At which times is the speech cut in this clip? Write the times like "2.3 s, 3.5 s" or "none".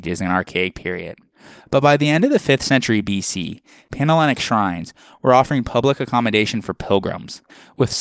none